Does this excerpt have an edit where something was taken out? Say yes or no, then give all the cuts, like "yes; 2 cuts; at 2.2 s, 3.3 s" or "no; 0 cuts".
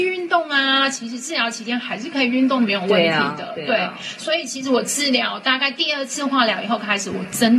no; 0 cuts